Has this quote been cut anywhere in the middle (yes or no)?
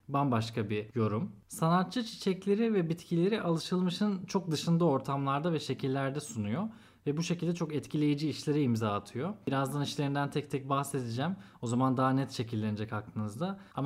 no